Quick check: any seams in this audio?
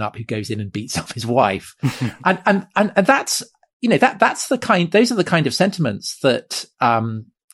no; 0 cuts

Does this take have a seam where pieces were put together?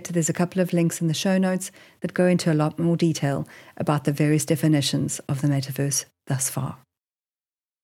no; 0 cuts

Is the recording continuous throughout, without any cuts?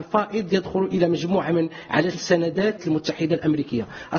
no; 2 cuts; at 2.1 s, 2.8 s

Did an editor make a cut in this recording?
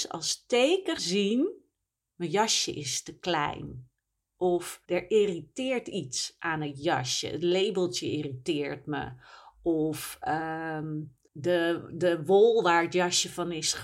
yes; 3 cuts; at 1.0 s, 4.8 s, 11.3 s

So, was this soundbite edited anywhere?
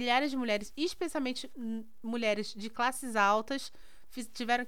no; 0 cuts

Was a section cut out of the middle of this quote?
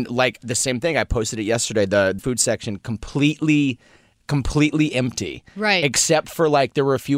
yes; 1 cut; at 2.2 s

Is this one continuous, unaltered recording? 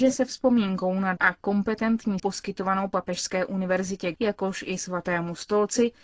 no; 3 cuts; at 1.2 s, 2.2 s, 4.1 s

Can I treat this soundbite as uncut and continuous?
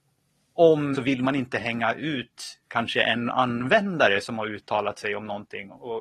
no; 1 cut; at 0.9 s

